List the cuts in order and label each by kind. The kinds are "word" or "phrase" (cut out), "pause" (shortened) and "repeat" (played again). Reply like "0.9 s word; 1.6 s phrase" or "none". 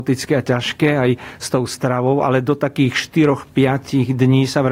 none

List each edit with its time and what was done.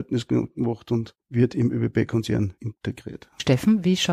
none

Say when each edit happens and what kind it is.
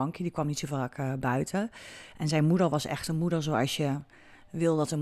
none

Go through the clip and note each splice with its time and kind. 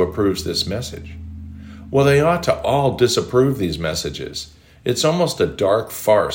none

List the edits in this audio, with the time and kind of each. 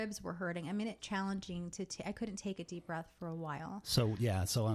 1.0 s phrase

